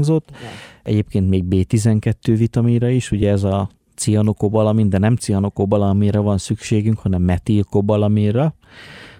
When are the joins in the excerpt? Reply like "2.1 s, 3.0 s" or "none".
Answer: none

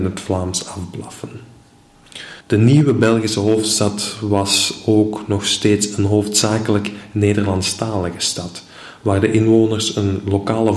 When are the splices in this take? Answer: 2.4 s

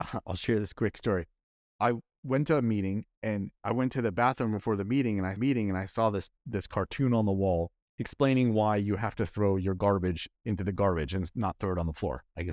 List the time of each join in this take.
5.4 s

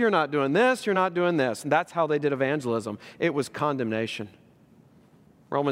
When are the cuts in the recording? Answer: none

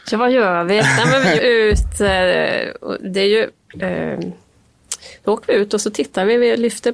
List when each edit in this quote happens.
1.4 s

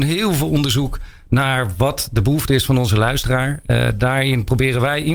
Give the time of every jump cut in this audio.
none

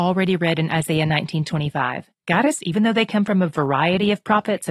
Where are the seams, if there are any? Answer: 2.1 s, 2.6 s

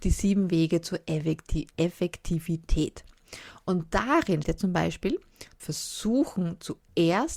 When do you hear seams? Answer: 4.4 s, 5.6 s

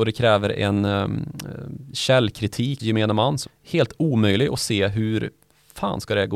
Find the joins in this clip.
2.8 s, 3.5 s

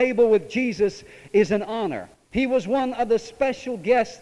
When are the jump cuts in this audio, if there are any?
none

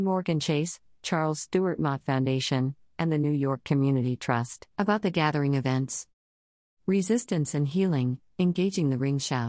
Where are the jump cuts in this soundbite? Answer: 4.7 s

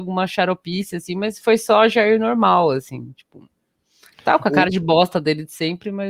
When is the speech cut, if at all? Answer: none

